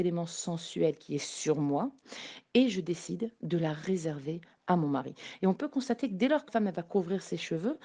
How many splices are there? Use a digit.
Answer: 1